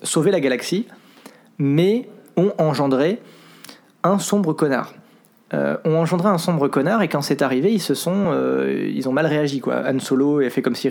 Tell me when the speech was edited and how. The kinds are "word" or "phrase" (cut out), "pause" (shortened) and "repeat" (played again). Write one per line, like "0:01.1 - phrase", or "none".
none